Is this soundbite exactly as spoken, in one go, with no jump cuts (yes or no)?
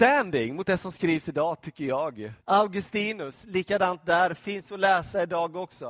no